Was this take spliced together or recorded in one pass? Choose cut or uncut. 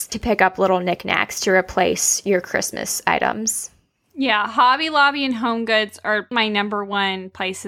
cut